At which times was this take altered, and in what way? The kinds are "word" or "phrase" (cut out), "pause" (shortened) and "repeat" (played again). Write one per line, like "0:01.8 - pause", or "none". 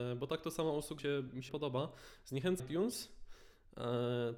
0:01.0 - word
0:01.5 - word
0:02.6 - word